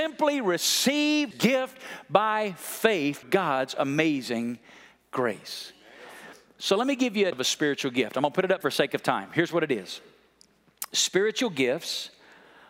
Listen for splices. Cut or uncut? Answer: cut